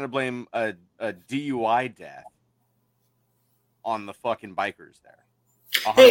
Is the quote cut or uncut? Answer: uncut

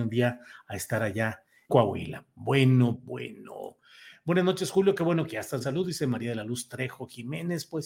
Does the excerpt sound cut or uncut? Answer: cut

